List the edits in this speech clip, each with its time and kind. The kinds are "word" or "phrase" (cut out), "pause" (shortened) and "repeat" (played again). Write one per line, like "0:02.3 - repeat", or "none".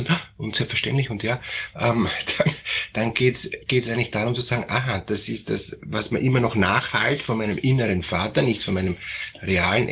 none